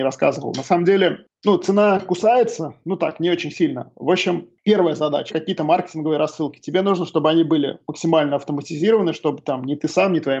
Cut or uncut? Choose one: cut